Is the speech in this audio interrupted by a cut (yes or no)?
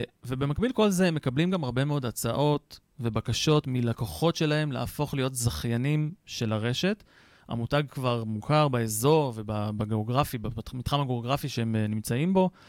no